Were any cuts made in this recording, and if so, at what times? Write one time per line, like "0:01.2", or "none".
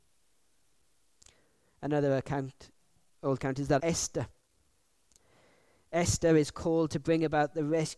0:03.4
0:03.8